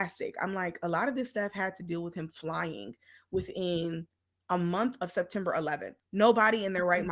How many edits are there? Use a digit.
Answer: 1